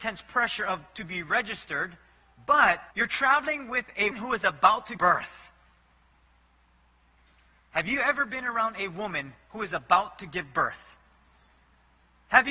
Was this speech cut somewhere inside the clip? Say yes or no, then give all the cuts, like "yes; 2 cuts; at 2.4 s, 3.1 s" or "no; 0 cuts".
yes; 3 cuts; at 2.9 s, 4.1 s, 5.0 s